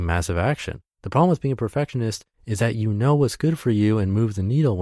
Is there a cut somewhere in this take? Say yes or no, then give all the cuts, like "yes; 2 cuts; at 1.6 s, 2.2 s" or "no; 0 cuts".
yes; 2 cuts; at 0.9 s, 2.3 s